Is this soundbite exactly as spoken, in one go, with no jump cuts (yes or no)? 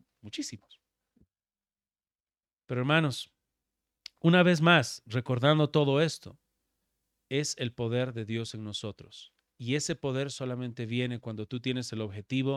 yes